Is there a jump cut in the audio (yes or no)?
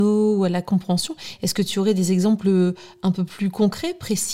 no